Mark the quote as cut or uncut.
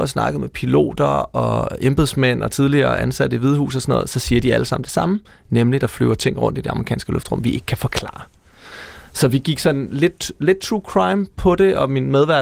uncut